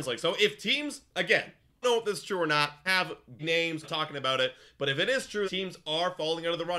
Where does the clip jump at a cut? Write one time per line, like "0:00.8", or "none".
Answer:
0:01.8
0:02.9
0:03.4
0:03.8
0:05.4